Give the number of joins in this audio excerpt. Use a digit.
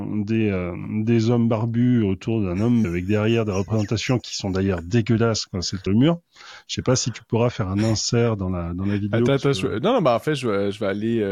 2